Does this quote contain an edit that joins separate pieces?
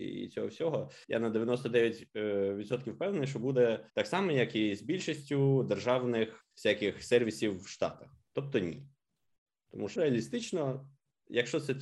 yes; 4 cuts; at 1.0 s, 3.9 s, 6.4 s, 10.0 s

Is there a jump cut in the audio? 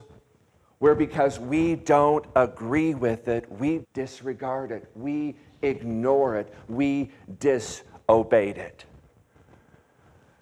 yes; 1 cut; at 3.8 s

